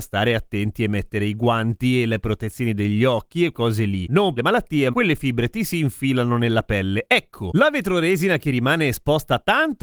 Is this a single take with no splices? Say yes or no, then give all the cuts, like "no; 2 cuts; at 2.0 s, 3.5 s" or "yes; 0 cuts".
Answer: no; 3 cuts; at 3.5 s, 4.4 s, 4.9 s